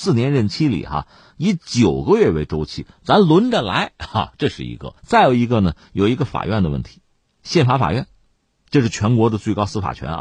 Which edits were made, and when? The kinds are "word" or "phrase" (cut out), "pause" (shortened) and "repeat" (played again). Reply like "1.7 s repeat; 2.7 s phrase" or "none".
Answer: 5.0 s pause